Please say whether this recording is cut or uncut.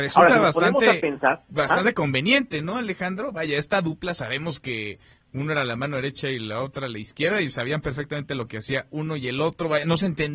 uncut